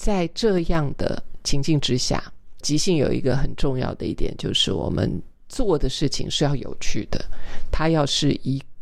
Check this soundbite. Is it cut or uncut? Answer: cut